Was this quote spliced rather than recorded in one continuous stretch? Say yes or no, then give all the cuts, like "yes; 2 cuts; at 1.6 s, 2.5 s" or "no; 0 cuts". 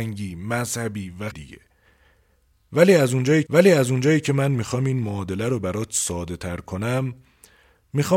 yes; 2 cuts; at 1.3 s, 3.4 s